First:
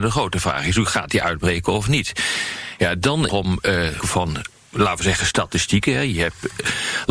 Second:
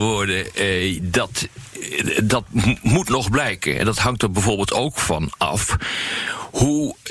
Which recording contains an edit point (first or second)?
first